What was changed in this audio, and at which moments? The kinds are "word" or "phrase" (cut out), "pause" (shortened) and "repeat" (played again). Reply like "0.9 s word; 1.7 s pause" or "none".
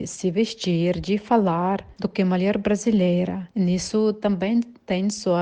none